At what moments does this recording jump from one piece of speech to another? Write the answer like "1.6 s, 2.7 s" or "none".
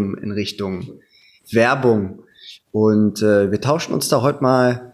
1.4 s